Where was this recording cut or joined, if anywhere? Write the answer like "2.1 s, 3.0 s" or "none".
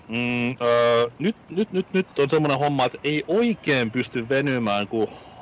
2.1 s